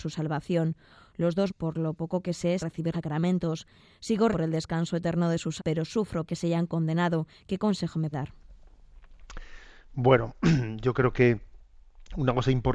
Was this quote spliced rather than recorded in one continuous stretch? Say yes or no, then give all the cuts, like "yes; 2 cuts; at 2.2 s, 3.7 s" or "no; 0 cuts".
yes; 7 cuts; at 1.5 s, 2.6 s, 2.9 s, 4.3 s, 5.6 s, 6.3 s, 8.1 s